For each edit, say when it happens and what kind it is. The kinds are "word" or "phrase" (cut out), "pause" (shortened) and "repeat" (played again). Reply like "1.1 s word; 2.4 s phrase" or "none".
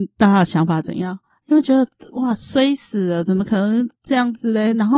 1.3 s pause; 3.9 s pause